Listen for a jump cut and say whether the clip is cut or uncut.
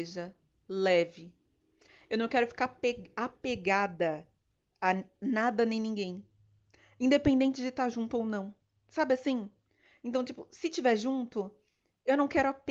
uncut